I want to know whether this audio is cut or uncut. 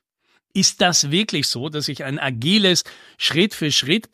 uncut